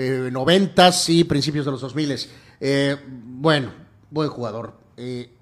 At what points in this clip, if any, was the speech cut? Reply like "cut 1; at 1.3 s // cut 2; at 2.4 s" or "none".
none